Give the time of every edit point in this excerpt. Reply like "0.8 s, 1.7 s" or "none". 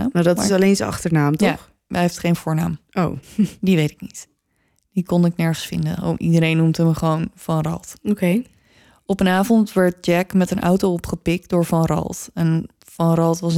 3.2 s

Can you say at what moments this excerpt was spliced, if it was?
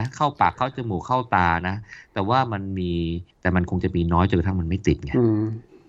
3.3 s

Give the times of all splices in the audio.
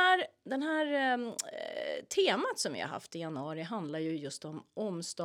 none

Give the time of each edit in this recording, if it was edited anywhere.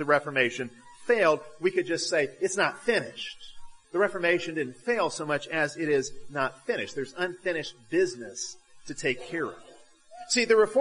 3.8 s

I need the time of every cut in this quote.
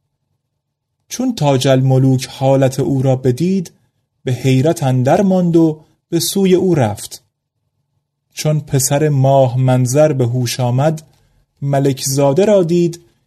none

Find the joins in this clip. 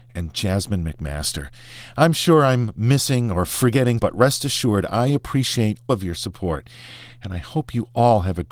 4.0 s, 5.9 s

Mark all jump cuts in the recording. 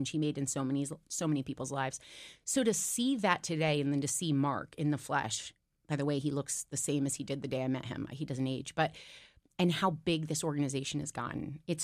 none

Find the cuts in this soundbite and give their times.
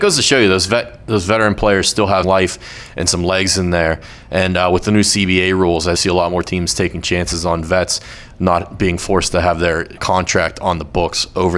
2.2 s, 5.9 s, 10.0 s

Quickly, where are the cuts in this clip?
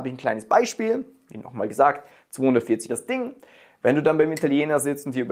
2.9 s

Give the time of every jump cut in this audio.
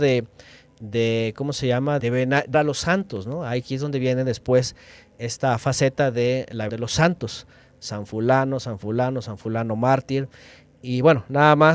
2.0 s, 2.5 s, 6.7 s

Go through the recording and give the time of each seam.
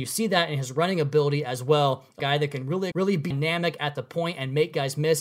2.2 s, 2.9 s, 3.3 s

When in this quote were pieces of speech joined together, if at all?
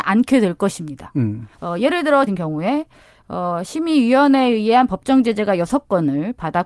1.5 s, 2.3 s

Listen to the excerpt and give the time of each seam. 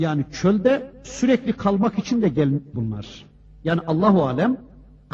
2.7 s

